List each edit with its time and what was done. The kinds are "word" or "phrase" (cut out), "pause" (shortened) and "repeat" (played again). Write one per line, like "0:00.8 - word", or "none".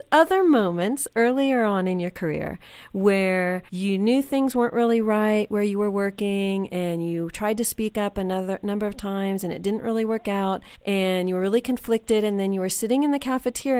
0:03.7 - pause
0:10.7 - pause